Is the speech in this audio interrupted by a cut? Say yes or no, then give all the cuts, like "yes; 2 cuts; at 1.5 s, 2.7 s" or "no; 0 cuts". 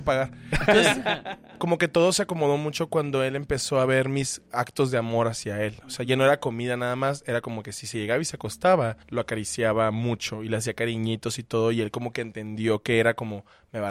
yes; 2 cuts; at 4.5 s, 9.0 s